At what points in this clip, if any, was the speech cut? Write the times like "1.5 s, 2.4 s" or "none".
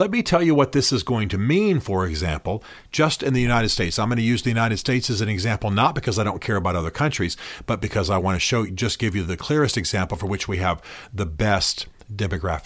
none